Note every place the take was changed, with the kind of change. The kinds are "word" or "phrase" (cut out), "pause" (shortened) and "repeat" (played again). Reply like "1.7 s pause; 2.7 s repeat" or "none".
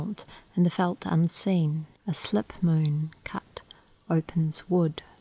2.0 s pause